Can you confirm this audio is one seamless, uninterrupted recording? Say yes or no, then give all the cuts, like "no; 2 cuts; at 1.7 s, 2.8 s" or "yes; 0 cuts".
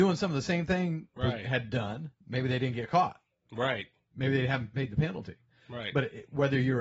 no; 2 cuts; at 1.2 s, 2.2 s